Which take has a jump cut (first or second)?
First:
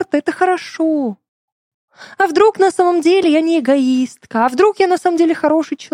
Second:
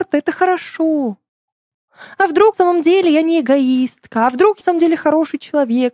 second